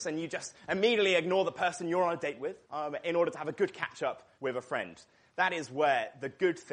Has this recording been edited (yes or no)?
yes